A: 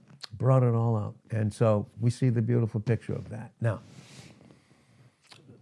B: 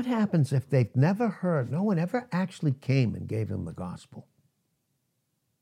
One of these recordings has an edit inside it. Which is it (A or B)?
A